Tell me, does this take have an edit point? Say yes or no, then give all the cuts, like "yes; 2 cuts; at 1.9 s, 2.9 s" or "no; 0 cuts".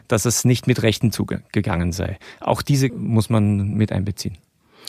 yes; 2 cuts; at 1.1 s, 2.9 s